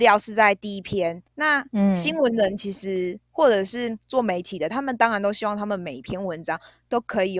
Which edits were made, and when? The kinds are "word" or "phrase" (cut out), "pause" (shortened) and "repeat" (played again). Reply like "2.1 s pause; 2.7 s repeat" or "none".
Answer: 1.3 s pause